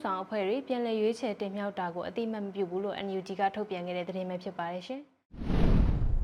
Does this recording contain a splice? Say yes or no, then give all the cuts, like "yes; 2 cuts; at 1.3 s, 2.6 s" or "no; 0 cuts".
no; 0 cuts